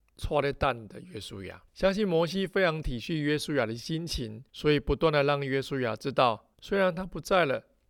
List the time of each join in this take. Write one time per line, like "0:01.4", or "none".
0:01.7
0:04.5
0:06.5